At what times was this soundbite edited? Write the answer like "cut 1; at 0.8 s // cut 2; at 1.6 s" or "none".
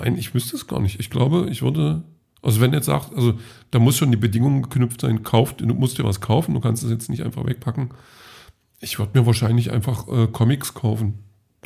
none